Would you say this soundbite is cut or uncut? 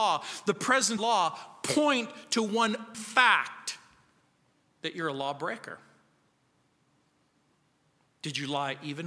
cut